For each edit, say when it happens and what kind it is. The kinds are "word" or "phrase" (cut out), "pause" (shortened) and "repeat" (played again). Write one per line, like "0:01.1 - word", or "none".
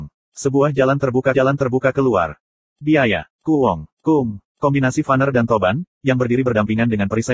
0:01.3 - repeat
0:03.3 - pause
0:04.4 - pause